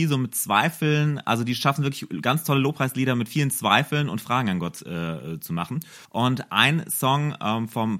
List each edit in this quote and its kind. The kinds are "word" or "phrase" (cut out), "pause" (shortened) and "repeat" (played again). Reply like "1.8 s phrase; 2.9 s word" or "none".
6.0 s pause